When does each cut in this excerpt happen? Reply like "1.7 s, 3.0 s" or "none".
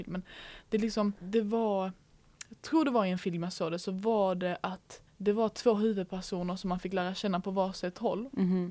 1.2 s, 5.1 s